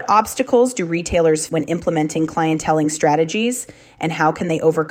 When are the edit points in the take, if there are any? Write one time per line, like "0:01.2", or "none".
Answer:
0:01.5